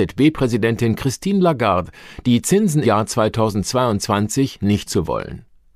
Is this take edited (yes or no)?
yes